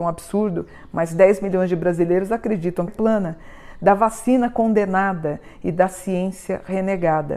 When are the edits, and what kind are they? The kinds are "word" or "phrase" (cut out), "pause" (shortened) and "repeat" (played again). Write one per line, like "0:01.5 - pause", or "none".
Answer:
0:02.9 - phrase